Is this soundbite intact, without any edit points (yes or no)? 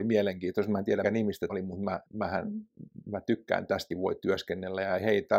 no